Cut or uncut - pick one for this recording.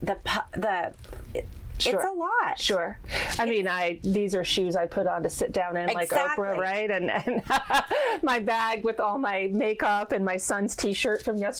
uncut